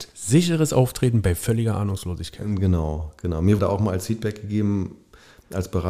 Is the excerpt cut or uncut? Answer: cut